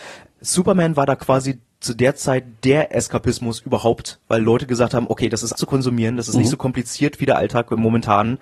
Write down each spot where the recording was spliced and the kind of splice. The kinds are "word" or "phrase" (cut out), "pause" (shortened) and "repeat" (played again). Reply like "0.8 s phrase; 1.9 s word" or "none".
5.5 s word

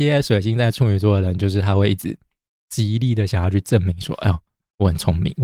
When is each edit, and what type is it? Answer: none

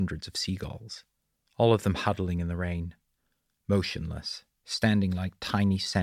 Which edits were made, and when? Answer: none

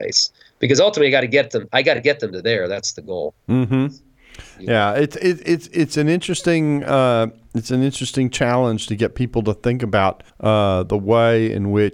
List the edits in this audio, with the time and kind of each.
10.3 s pause

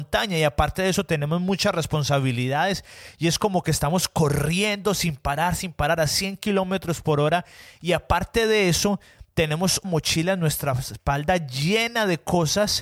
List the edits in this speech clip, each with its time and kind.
9.8 s word

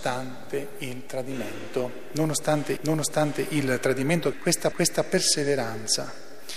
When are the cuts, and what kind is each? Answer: 2.8 s repeat; 4.3 s phrase; 4.7 s repeat

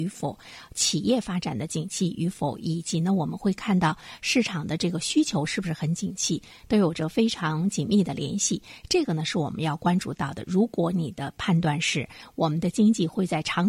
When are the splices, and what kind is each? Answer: none

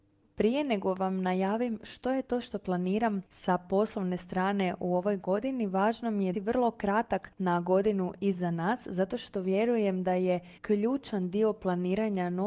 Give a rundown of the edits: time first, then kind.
6.3 s word; 7.4 s word; 10.6 s pause

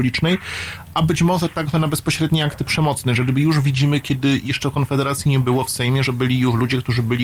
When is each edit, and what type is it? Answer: none

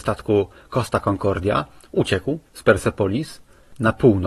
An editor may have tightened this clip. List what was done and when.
2.5 s pause

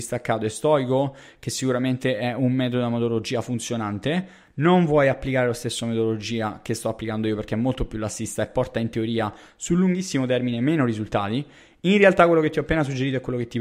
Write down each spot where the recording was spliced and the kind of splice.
none

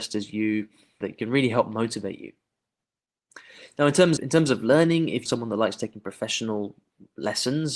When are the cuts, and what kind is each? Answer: 1.0 s word; 4.2 s word; 5.3 s word

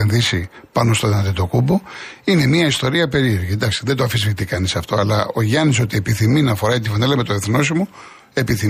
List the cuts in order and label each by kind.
none

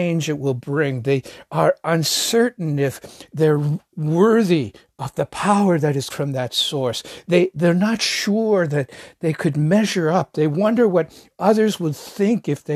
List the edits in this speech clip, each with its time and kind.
6.1 s word

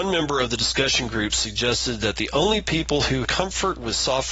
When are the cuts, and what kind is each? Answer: 3.2 s word

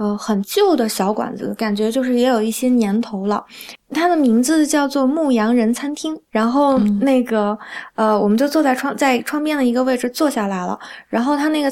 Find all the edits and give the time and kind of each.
6.3 s pause

